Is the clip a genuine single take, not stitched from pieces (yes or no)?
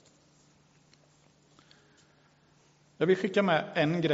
yes